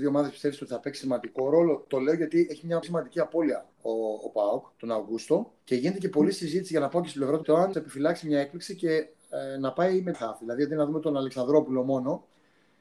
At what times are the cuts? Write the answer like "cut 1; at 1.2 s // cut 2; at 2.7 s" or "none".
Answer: cut 1; at 2.8 s // cut 2; at 3.7 s // cut 3; at 4.7 s // cut 4; at 5.6 s // cut 5; at 7.4 s // cut 6; at 7.7 s // cut 7; at 10.1 s